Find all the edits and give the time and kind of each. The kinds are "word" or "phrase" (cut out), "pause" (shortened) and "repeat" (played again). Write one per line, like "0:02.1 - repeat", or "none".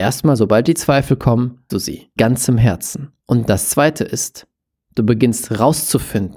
0:01.7 - word
0:02.2 - word
0:03.2 - pause